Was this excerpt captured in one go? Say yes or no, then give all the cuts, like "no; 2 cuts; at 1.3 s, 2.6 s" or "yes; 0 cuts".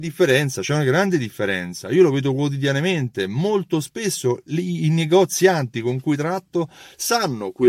yes; 0 cuts